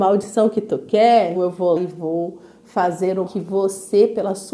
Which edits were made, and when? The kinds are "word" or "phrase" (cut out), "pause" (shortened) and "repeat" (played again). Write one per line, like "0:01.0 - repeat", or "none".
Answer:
0:01.3 - word
0:01.8 - word
0:03.3 - word

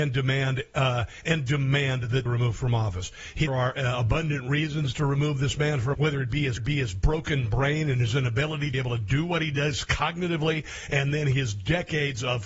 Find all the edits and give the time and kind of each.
0:02.3 - phrase
0:03.5 - word
0:05.9 - word
0:06.6 - repeat
0:08.7 - word

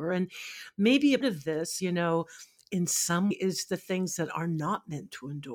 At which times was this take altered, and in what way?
0:01.2 - word
0:01.8 - word
0:03.3 - word

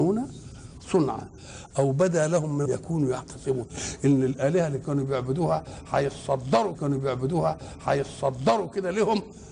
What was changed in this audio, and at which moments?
0:02.7 - phrase
0:06.7 - repeat

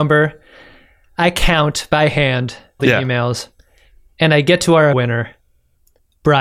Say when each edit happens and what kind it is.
0:02.8 - word
0:04.9 - word

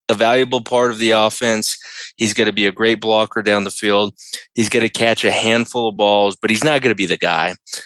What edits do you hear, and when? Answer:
none

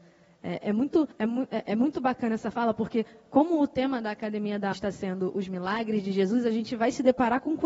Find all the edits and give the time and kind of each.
0:01.1 - pause
0:04.7 - word

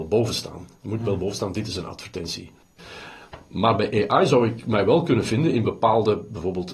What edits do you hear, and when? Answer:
none

